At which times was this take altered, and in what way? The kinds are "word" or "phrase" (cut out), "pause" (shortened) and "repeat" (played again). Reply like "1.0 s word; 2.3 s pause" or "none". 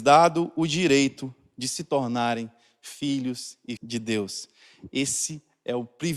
3.8 s word